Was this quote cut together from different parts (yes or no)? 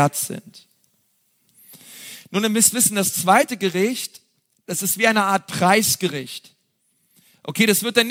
no